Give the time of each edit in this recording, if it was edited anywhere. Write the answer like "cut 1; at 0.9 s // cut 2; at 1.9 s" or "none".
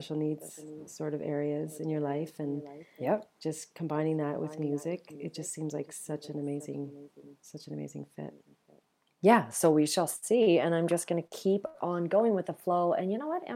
none